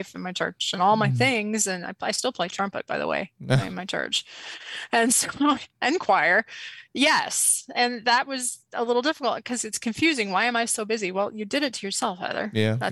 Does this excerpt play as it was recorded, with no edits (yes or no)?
yes